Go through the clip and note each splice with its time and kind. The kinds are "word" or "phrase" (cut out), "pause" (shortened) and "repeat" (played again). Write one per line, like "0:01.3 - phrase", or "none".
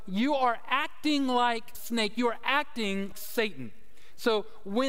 0:01.7 - word
0:03.1 - word